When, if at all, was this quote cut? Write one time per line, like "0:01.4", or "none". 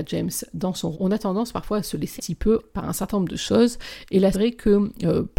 0:00.9
0:02.2
0:02.7
0:04.3

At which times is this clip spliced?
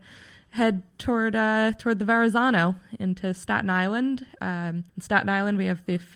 0:04.9

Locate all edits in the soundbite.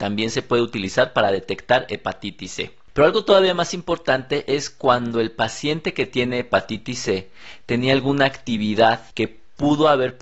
0:09.1

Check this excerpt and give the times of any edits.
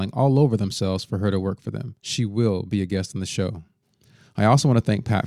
0:02.0

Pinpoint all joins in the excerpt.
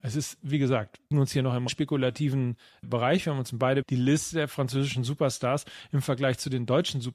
0:01.1
0:01.7
0:02.8
0:03.8

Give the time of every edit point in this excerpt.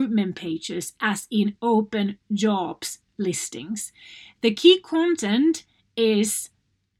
none

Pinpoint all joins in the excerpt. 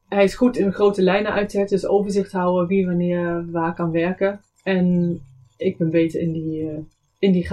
none

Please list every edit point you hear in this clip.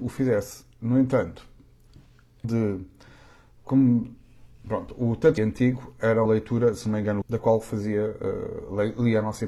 0:02.4
0:05.4
0:06.3
0:07.2

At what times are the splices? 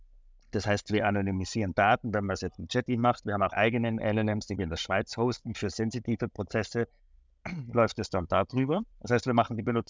0:02.9
0:03.5
0:05.7
0:08.9

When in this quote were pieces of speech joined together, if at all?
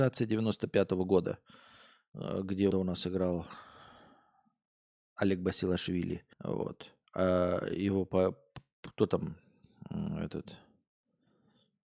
0:02.7
0:06.3

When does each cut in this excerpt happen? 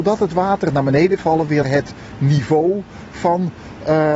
0:01.2
0:01.6

